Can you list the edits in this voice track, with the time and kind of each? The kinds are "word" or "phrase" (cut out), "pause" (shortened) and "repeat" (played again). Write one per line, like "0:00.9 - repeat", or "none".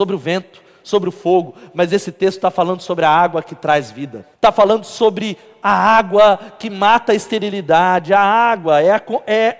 0:04.3 - pause